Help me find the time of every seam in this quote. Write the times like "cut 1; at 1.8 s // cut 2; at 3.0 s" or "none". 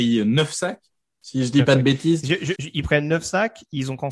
cut 1; at 2.6 s